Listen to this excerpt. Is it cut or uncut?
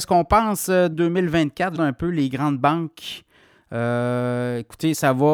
cut